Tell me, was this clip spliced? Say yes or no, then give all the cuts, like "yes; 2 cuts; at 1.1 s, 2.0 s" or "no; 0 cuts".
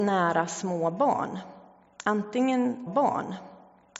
yes; 1 cut; at 2.9 s